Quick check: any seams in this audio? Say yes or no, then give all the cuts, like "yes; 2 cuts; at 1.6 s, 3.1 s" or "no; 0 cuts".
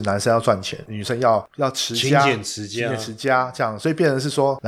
no; 0 cuts